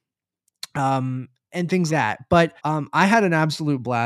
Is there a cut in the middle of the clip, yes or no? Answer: yes